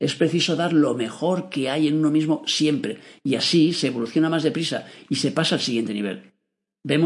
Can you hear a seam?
no; 0 cuts

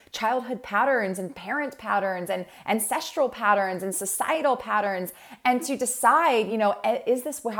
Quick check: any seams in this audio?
no; 0 cuts

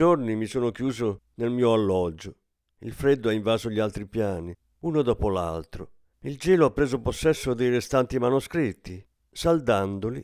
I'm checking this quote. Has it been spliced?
no; 0 cuts

